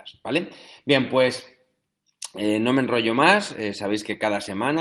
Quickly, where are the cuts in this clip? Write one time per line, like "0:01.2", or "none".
none